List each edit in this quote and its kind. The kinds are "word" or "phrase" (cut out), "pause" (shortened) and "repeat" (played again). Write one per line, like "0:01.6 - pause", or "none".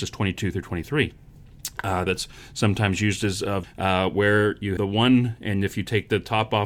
0:02.1 - phrase
0:03.6 - phrase
0:04.8 - word